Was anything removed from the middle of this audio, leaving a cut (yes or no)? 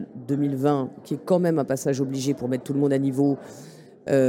no